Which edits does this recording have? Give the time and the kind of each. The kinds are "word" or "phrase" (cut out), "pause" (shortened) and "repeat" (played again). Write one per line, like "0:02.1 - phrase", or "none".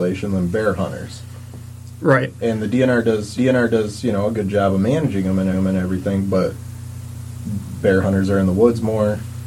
0:03.4 - repeat
0:05.5 - repeat